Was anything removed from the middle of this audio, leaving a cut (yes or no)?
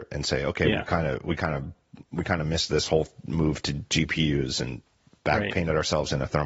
no